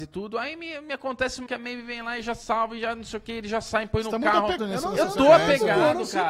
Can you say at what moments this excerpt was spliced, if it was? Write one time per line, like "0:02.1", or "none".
0:01.5
0:04.6